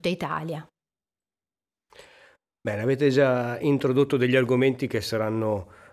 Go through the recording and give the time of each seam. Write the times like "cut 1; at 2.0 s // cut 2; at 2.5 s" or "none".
none